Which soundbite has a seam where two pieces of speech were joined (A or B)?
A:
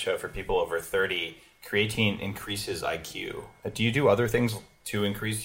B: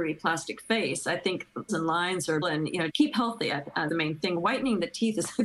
B